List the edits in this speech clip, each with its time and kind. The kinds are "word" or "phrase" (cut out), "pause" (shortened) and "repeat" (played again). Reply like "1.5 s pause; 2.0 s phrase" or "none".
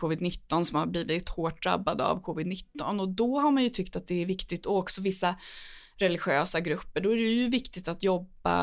none